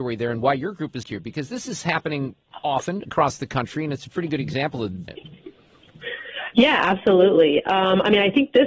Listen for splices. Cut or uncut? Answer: cut